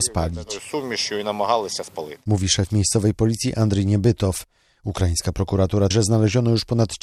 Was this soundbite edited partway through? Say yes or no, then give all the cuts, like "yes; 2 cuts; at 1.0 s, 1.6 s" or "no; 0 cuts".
yes; 1 cut; at 5.9 s